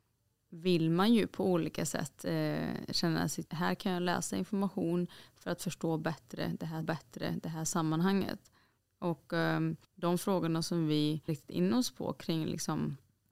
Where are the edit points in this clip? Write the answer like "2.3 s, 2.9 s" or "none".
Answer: 3.5 s, 6.8 s, 9.8 s, 11.3 s

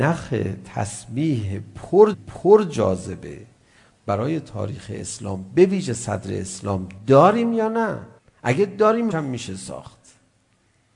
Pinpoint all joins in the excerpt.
2.1 s, 8.2 s, 9.1 s

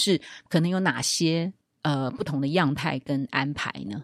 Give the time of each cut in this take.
1.6 s

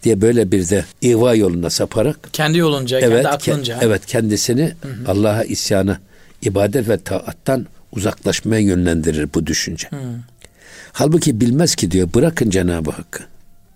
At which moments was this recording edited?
0.9 s

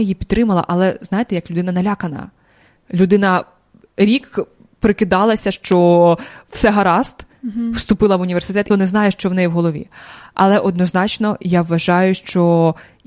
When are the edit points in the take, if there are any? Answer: 8.7 s

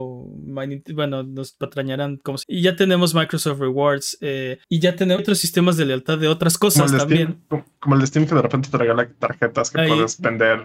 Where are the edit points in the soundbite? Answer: 2.4 s, 4.6 s, 5.2 s

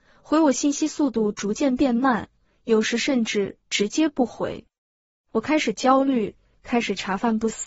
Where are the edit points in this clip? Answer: none

